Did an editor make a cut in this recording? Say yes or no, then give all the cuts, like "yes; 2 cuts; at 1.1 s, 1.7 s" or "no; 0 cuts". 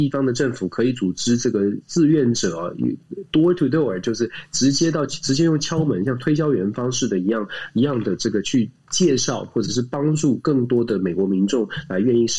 no; 0 cuts